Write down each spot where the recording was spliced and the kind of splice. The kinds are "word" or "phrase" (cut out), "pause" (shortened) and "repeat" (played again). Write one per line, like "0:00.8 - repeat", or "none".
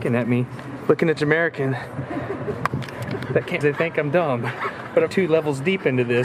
0:01.2 - phrase
0:03.6 - phrase
0:05.1 - word